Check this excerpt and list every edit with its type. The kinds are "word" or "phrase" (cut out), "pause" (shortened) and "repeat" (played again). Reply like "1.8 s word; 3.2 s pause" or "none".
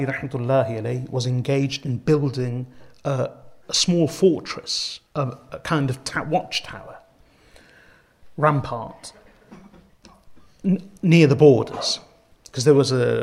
5.1 s pause